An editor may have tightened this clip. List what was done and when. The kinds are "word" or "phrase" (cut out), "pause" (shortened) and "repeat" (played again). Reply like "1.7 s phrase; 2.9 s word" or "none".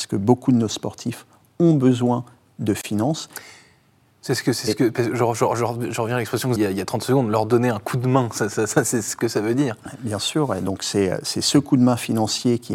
6.6 s phrase